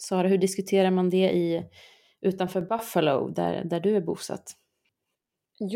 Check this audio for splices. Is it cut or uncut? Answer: uncut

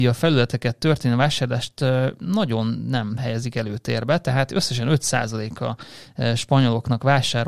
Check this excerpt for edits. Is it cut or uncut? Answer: uncut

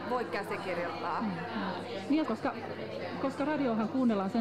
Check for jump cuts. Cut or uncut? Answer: cut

